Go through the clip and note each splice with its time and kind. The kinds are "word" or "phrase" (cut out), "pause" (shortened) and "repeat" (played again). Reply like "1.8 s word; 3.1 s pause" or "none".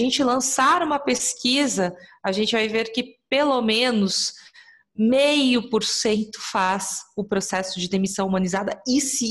none